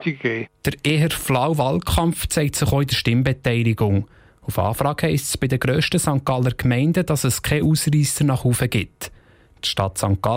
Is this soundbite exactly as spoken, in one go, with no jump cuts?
yes; 0 cuts

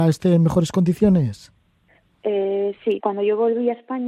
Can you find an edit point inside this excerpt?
yes; 1 cut; at 3.0 s

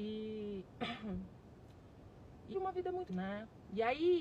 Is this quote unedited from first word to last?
no; 2 cuts; at 2.5 s, 3.1 s

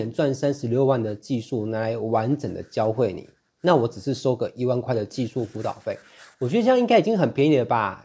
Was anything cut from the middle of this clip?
no; 0 cuts

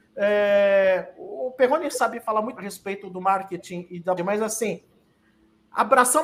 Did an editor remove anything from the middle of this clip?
yes; 2 cuts; at 2.6 s, 4.2 s

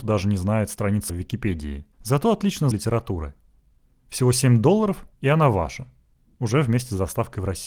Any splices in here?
yes; 4 cuts; at 1.1 s, 1.9 s, 2.7 s, 5.1 s

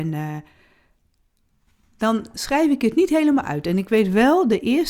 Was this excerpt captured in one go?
yes; 0 cuts

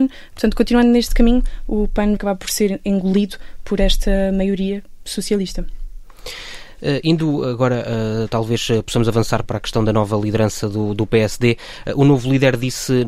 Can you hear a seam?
yes; 2 cuts; at 2.2 s, 9.4 s

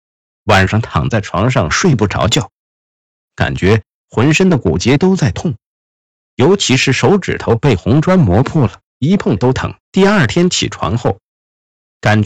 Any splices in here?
yes; 2 cuts; at 8.9 s, 9.8 s

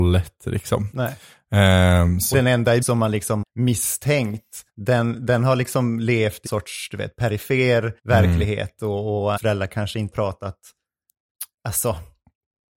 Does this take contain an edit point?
yes; 8 cuts; at 2.3 s, 2.8 s, 3.4 s, 4.7 s, 6.5 s, 8.0 s, 9.4 s, 10.1 s

